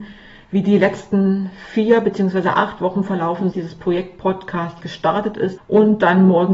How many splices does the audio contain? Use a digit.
3